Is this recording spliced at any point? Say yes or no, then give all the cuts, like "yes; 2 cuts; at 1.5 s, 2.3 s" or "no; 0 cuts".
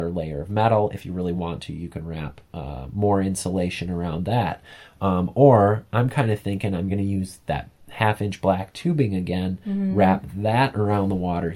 no; 0 cuts